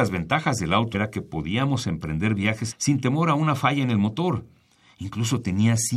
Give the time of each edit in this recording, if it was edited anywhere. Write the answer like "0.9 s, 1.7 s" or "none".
0.9 s, 2.7 s